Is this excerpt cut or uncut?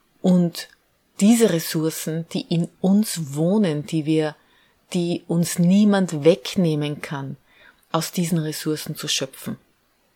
uncut